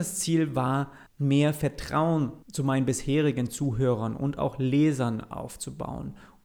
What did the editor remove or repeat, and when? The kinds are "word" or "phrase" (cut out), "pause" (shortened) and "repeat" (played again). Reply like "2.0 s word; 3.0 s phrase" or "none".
1.1 s pause; 2.4 s pause